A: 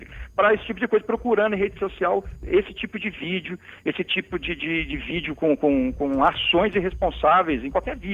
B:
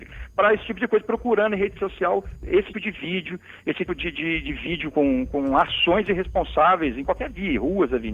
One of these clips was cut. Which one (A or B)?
B